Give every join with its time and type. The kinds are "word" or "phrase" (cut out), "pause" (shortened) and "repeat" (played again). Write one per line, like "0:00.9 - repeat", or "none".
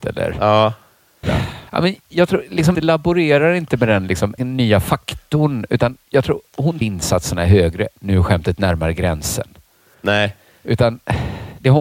0:01.2 - word
0:01.7 - pause
0:02.0 - pause
0:02.7 - phrase
0:04.4 - phrase
0:06.1 - pause
0:06.8 - phrase